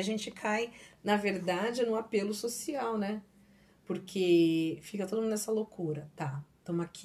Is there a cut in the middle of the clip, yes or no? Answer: no